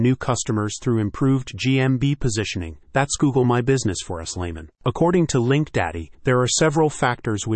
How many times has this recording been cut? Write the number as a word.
two